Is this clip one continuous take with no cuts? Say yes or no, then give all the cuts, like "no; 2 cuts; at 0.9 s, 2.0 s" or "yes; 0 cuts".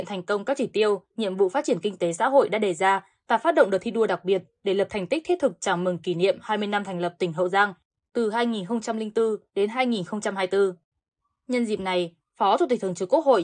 yes; 0 cuts